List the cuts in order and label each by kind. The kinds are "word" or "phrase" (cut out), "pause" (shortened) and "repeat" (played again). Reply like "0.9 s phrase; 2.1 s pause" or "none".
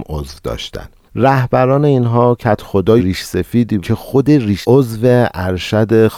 3.0 s word; 3.8 s word; 4.6 s word